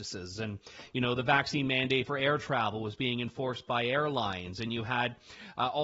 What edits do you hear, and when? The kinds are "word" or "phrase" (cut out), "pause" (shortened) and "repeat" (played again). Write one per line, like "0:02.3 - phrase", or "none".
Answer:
none